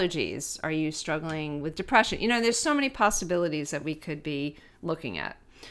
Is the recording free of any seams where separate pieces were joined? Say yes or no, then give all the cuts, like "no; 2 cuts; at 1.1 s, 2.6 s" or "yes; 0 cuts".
yes; 0 cuts